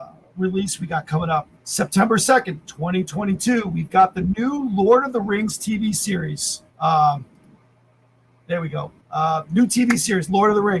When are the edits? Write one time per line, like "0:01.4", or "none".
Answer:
0:01.6
0:06.7
0:09.0